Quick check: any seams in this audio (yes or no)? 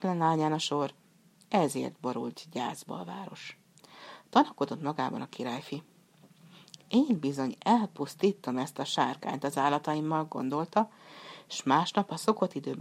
no